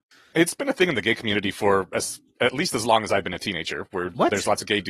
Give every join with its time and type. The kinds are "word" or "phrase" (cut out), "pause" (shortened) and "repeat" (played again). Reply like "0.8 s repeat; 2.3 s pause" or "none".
none